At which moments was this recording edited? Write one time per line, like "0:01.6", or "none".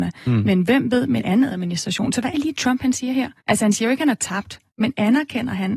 0:01.2
0:02.3
0:03.4
0:04.7

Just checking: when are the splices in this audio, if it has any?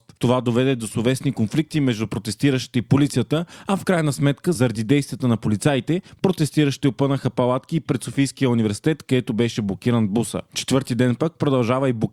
none

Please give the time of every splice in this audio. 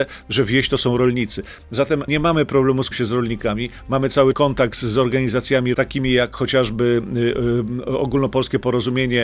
0:02.1
0:02.9
0:04.3
0:05.7

